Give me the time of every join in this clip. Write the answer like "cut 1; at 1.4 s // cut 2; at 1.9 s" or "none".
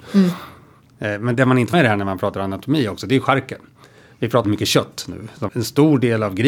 cut 1; at 1.3 s // cut 2; at 1.7 s // cut 3; at 4.4 s // cut 4; at 5.5 s